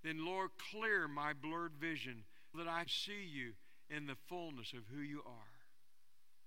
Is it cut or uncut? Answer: cut